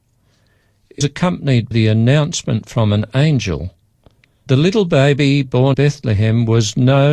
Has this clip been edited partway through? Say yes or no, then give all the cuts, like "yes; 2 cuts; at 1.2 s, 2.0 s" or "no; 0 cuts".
yes; 4 cuts; at 1.0 s, 1.7 s, 4.5 s, 5.7 s